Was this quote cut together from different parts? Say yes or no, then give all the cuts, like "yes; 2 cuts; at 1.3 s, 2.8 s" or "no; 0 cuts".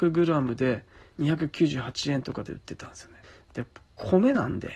yes; 1 cut; at 3.2 s